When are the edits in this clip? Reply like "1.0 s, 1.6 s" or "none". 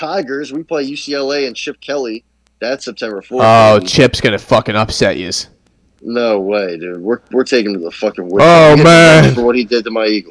none

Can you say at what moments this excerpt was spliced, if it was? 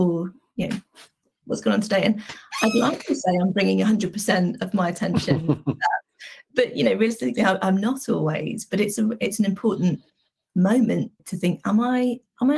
11.2 s

